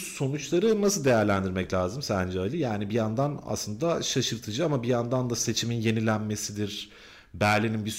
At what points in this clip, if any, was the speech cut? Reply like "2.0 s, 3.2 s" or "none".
none